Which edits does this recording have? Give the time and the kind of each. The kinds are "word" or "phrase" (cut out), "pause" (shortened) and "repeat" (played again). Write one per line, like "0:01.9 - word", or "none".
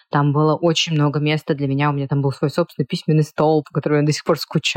none